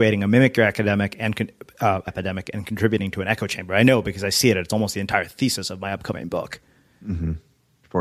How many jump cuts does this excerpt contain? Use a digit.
1